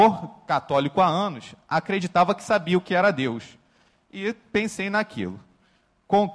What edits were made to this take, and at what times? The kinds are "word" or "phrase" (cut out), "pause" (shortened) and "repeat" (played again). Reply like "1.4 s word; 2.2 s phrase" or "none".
none